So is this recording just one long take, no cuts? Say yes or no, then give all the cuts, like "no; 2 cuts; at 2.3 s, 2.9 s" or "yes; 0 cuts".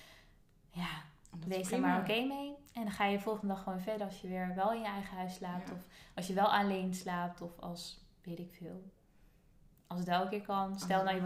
yes; 0 cuts